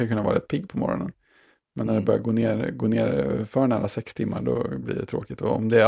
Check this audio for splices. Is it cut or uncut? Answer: uncut